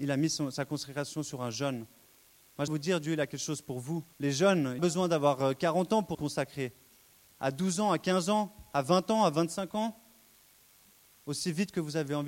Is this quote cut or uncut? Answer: cut